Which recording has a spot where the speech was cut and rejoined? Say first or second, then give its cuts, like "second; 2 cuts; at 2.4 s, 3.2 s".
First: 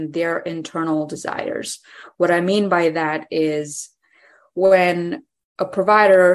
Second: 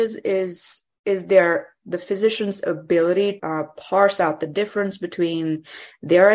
second; 1 cut; at 3.4 s